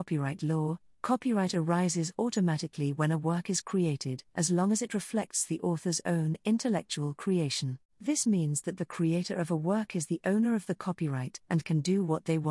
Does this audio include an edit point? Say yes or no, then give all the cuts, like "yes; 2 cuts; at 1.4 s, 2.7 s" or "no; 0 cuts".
yes; 3 cuts; at 4.3 s, 7.9 s, 11.4 s